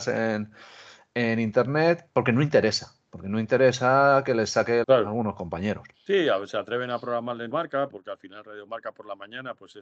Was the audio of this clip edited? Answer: yes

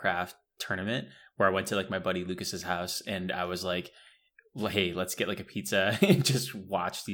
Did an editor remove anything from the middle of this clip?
no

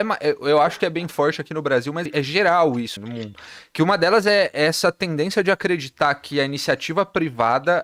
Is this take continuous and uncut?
no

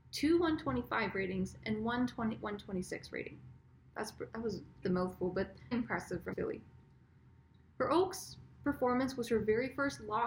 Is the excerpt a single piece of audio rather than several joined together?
no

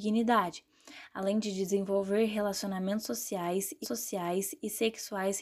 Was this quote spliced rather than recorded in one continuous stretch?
yes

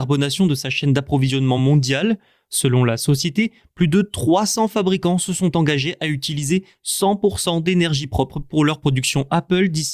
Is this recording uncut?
yes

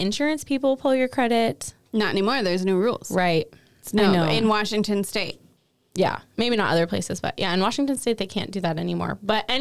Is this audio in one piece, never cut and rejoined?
no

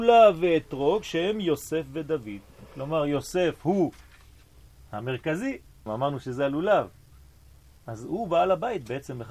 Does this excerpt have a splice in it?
yes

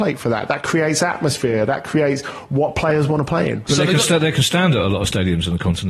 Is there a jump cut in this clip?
no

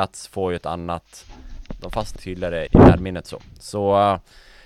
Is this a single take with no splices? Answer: no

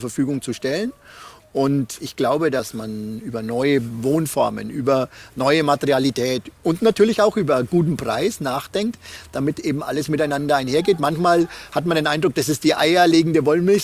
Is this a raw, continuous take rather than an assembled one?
yes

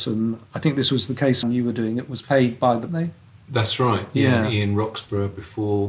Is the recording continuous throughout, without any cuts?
no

